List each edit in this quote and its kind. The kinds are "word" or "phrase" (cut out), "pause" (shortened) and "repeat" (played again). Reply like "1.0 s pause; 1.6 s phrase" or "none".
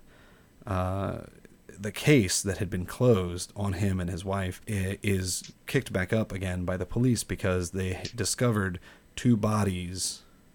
4.6 s pause